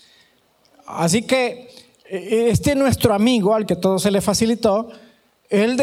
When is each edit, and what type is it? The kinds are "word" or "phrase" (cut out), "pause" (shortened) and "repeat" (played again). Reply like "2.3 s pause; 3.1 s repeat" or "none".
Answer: none